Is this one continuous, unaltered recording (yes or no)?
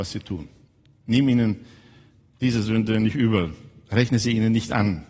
yes